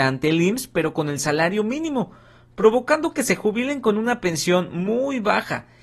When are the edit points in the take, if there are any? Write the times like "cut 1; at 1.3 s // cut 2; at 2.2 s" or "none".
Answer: none